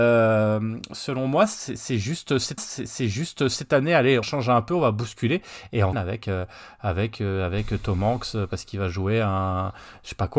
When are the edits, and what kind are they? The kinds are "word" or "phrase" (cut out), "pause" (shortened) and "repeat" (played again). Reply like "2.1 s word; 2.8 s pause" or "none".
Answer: 2.6 s repeat; 4.2 s word; 5.9 s phrase